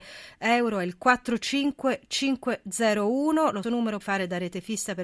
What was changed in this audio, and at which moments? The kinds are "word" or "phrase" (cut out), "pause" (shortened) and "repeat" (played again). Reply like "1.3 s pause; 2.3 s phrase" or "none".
3.6 s word; 4.0 s word